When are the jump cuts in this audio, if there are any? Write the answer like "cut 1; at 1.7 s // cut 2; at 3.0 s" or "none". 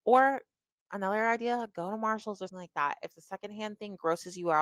cut 1; at 2.5 s